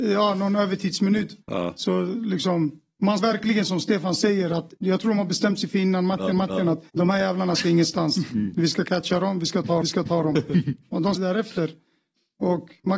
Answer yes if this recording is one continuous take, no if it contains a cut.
no